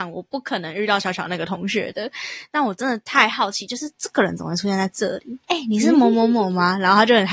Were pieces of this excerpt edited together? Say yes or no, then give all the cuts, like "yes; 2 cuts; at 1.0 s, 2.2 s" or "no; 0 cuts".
yes; 1 cut; at 5.4 s